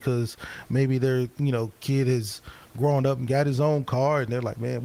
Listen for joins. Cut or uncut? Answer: uncut